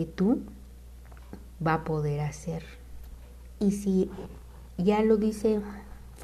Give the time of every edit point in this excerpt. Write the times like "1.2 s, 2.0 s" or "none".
none